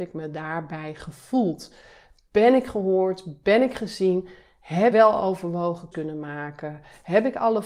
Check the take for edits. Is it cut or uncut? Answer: cut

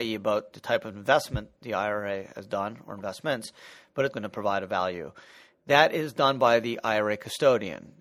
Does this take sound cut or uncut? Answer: cut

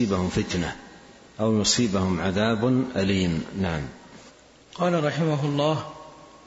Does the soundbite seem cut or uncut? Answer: cut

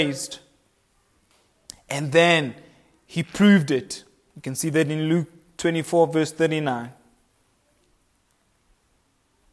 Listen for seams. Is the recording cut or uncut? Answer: uncut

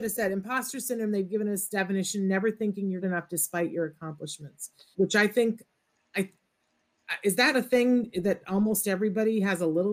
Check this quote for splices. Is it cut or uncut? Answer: cut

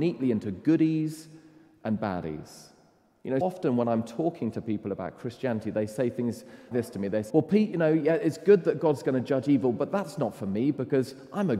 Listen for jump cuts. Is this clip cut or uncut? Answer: cut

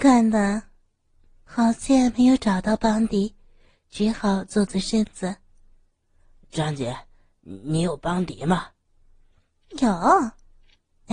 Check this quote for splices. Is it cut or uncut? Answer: uncut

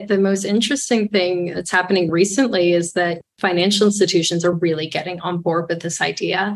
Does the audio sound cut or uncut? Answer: uncut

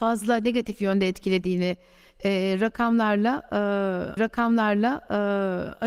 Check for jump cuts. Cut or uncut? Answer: cut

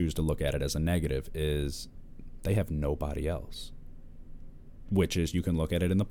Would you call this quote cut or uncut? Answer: uncut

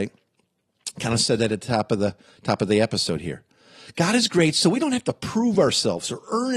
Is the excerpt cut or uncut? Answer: uncut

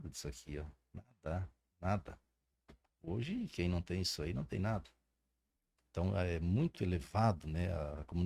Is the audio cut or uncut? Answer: uncut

